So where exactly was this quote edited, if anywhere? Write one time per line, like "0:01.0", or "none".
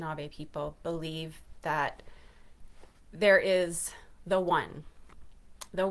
none